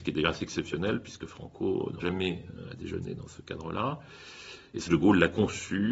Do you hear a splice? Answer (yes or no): yes